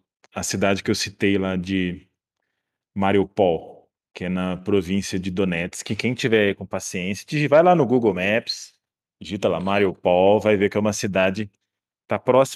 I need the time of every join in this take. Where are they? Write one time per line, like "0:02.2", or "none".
none